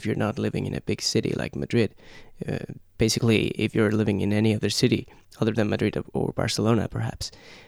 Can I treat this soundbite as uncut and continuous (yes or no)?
yes